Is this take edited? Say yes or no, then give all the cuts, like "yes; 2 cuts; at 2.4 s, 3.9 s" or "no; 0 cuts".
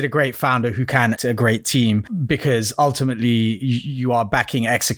yes; 1 cut; at 1.2 s